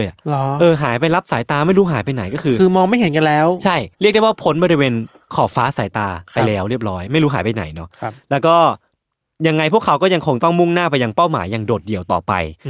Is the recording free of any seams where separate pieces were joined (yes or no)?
no